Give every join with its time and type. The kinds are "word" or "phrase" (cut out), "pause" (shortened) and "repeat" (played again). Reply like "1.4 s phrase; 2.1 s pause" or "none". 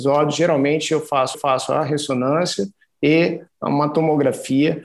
1.3 s repeat